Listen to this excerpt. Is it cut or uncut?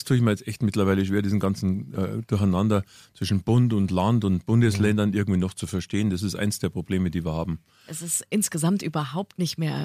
uncut